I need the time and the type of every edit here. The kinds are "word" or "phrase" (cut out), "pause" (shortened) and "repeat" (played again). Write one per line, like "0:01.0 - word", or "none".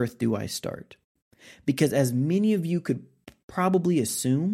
none

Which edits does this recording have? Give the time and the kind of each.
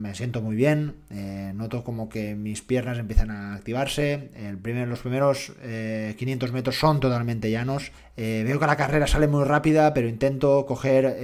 0:08.0 - pause

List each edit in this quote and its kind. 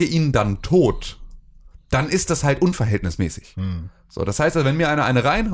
none

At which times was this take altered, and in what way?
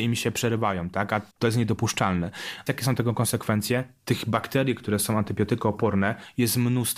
0:01.3 - pause
0:02.7 - phrase

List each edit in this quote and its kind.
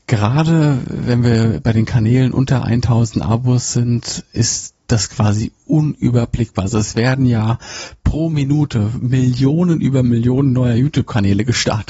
0:04.8 - pause

